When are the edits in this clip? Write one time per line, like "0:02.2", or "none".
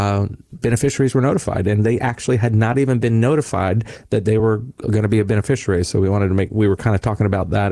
none